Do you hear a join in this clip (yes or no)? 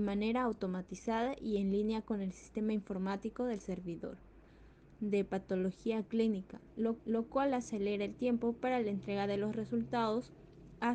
yes